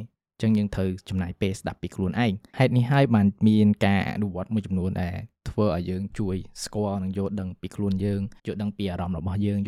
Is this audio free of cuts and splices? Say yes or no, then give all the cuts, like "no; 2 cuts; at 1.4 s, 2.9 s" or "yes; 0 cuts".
no; 1 cut; at 8.4 s